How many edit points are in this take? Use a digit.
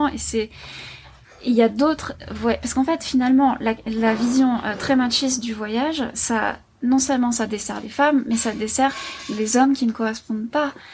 0